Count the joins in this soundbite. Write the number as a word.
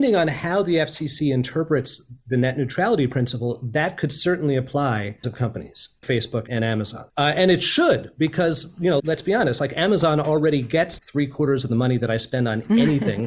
six